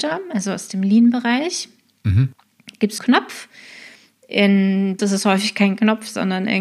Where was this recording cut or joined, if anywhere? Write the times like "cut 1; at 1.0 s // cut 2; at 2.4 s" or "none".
cut 1; at 3.0 s // cut 2; at 5.0 s